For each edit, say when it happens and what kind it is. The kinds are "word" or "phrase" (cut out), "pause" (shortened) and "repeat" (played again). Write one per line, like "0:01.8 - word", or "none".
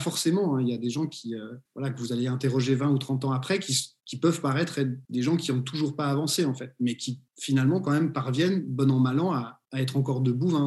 0:01.7 - pause
0:04.0 - pause
0:05.0 - pause
0:07.3 - pause
0:09.6 - pause